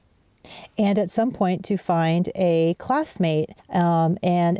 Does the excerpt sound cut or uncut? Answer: cut